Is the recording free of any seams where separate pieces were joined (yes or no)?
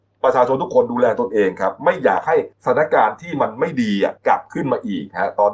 no